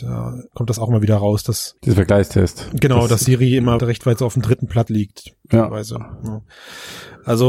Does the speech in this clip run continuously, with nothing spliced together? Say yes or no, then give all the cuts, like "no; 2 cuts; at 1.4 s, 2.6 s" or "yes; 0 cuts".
no; 3 cuts; at 1.8 s, 3.8 s, 4.9 s